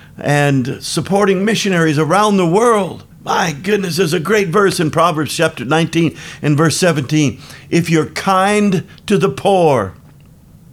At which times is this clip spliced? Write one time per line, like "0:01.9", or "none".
0:03.1